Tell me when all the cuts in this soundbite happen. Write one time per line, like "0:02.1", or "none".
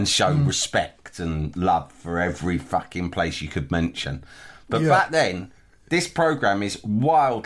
none